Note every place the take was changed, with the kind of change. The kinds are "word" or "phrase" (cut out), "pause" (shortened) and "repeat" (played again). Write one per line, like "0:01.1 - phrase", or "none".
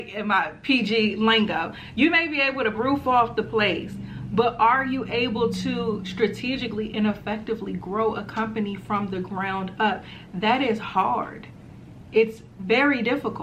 0:02.7 - phrase